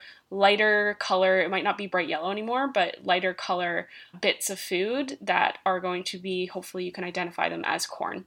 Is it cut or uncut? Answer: cut